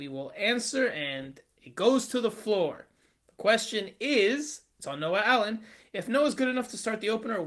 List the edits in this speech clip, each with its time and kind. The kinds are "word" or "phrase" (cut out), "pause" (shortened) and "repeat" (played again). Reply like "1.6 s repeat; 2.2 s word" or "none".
none